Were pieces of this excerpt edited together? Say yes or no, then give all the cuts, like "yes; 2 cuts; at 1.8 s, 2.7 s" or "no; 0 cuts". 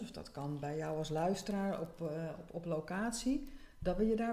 no; 0 cuts